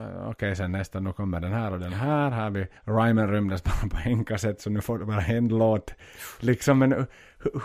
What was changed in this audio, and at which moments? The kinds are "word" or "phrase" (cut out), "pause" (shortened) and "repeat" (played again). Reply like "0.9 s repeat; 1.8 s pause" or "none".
2.8 s pause